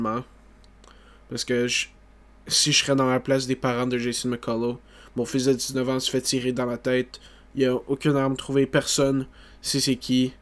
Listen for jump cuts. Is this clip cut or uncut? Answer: uncut